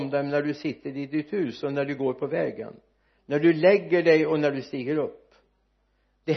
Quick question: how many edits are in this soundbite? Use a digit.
0